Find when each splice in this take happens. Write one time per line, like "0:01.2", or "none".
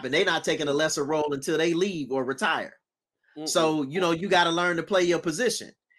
none